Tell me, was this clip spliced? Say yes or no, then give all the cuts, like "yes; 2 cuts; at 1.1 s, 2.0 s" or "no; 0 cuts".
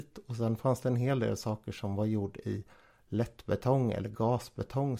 no; 0 cuts